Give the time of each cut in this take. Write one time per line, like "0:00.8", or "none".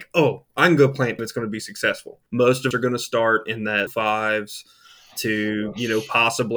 0:01.2
0:02.3
0:02.7
0:03.9

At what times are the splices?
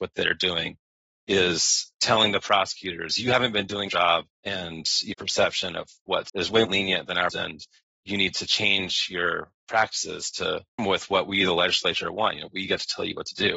0:03.9
0:04.3
0:05.1
0:06.3
0:06.6
0:07.3
0:10.8

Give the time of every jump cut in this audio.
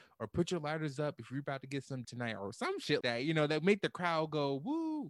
0:02.0
0:03.0

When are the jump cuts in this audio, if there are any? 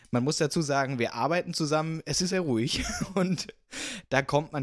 0:02.3

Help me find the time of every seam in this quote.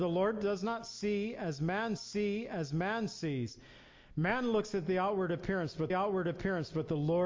0:02.0
0:05.9

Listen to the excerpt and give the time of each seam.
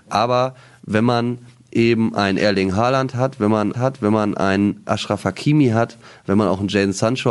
0:03.7

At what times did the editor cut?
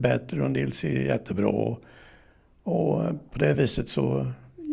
none

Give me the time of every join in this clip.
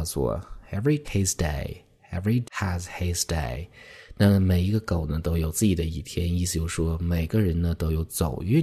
0:01.0
0:02.4

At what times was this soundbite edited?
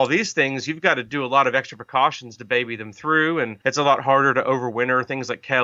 none

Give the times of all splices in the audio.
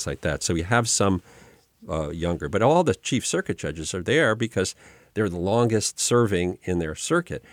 none

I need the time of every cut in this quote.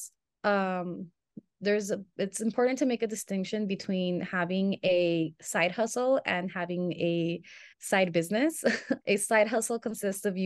0:07.7
0:09.0

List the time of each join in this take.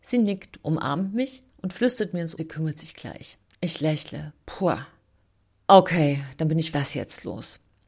0:01.5
0:02.4
0:03.5
0:05.2
0:06.7

